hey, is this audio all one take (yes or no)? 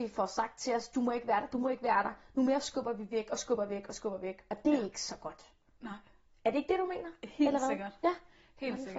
yes